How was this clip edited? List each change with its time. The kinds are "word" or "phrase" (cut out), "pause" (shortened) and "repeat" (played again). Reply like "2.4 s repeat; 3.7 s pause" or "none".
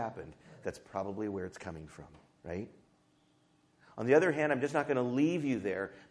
none